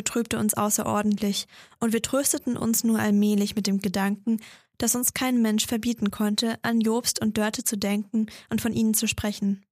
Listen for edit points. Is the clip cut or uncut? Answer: uncut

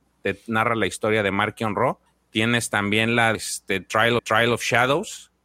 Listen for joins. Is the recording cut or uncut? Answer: cut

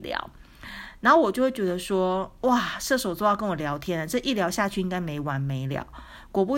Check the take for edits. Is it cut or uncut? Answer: uncut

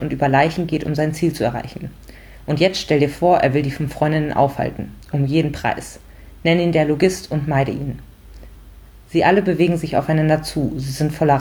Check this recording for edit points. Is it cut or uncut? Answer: uncut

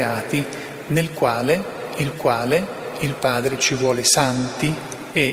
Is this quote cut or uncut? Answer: cut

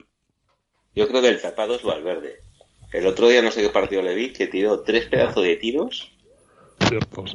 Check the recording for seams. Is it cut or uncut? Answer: uncut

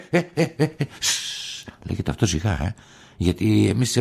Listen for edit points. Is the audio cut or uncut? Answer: uncut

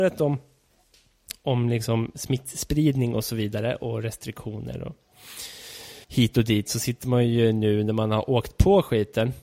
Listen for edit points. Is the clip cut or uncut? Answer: cut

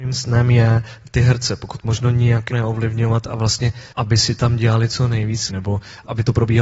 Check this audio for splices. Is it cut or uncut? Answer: cut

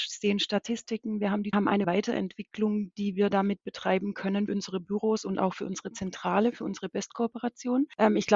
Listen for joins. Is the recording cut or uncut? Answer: cut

